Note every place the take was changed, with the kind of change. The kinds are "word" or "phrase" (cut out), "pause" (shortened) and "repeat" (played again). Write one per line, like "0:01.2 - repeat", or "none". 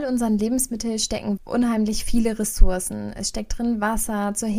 0:01.4 - word